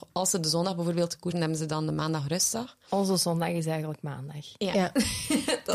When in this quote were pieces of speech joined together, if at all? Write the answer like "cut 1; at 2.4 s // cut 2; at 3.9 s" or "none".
cut 1; at 1.3 s